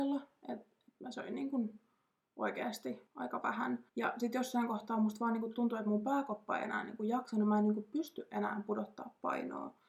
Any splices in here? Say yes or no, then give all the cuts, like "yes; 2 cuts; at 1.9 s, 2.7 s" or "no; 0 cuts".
yes; 2 cuts; at 3.1 s, 3.9 s